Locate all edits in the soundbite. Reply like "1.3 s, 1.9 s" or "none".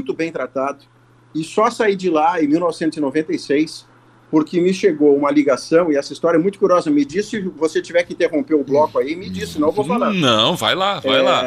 none

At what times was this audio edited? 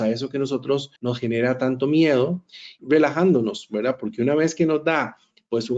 1.0 s, 2.8 s

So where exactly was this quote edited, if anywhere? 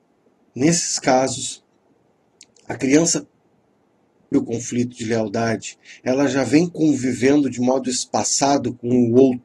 4.3 s

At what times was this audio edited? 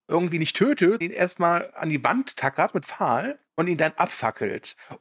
1.0 s, 2.8 s, 3.5 s

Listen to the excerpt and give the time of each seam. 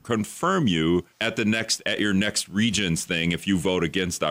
1.1 s

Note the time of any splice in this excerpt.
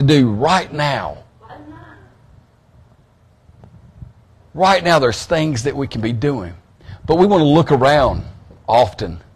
none

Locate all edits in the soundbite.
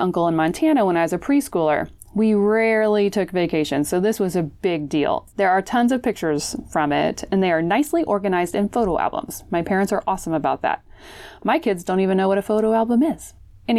5.3 s

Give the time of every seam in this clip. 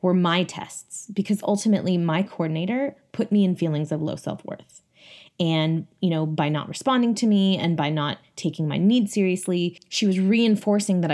none

